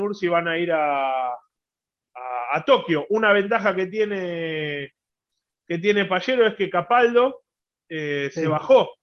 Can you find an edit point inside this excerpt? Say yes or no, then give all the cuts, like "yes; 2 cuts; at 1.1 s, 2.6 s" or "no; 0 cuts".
no; 0 cuts